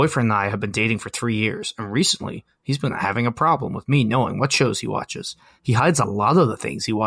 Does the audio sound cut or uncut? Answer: uncut